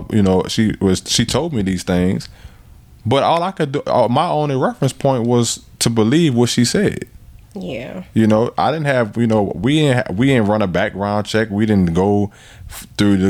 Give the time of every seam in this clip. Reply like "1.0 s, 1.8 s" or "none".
none